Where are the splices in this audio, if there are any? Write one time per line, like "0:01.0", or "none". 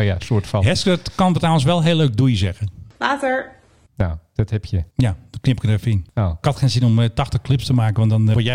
0:04.9